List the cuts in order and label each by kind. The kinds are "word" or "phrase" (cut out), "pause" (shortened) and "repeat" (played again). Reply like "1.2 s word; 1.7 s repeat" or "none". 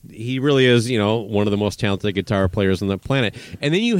none